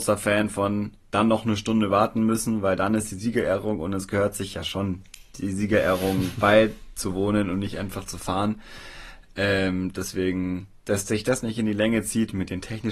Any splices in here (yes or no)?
yes